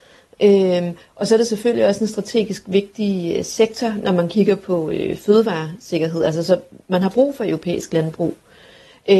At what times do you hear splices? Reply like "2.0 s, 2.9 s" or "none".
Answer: none